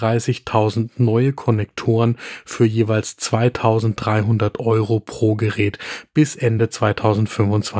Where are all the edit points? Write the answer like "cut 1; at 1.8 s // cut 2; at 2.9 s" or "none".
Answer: none